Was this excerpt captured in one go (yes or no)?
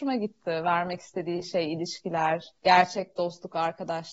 no